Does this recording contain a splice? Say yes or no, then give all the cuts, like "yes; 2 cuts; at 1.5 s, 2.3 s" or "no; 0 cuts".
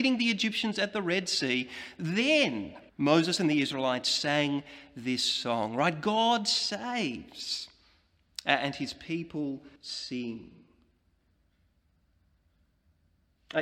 yes; 2 cuts; at 2.9 s, 9.8 s